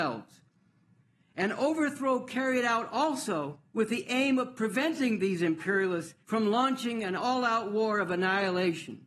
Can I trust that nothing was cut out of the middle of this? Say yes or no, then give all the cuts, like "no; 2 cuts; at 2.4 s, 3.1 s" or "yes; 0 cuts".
no; 2 cuts; at 3.7 s, 6.2 s